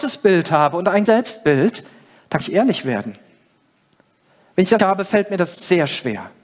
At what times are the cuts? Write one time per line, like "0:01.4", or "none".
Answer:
0:01.1
0:02.4
0:04.8